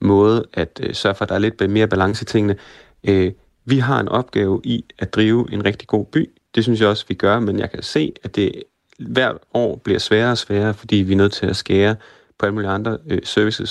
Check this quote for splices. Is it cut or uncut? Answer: uncut